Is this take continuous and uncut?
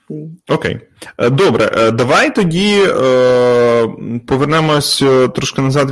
yes; 0 cuts

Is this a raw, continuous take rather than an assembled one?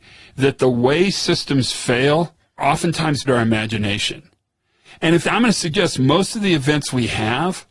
no; 3 cuts; at 2.6 s, 3.2 s, 5.2 s

